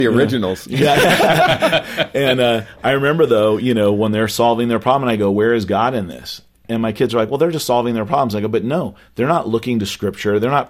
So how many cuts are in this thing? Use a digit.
0